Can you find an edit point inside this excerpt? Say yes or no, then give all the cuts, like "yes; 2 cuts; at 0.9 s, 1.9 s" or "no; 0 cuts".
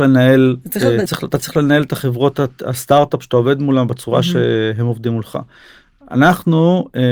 yes; 1 cut; at 1.1 s